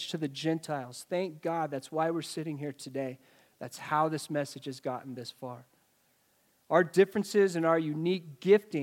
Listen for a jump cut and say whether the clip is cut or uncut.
uncut